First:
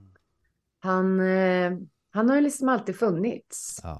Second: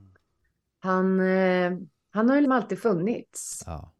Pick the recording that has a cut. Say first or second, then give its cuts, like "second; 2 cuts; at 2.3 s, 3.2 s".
second; 1 cut; at 2.4 s